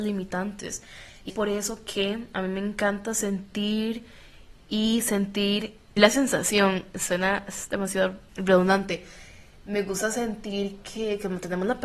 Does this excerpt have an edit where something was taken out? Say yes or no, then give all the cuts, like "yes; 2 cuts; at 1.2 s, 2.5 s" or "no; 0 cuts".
yes; 3 cuts; at 1.3 s, 6.0 s, 8.3 s